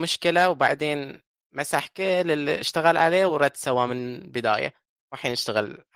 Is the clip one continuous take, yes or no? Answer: yes